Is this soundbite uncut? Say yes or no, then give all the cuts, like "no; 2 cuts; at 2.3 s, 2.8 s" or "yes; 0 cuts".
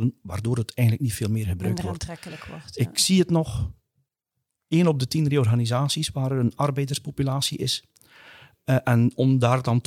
yes; 0 cuts